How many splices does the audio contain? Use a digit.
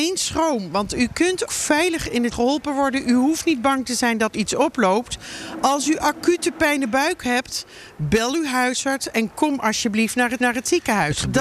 4